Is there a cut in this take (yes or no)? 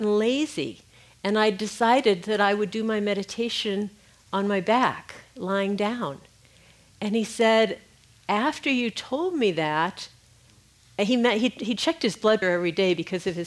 yes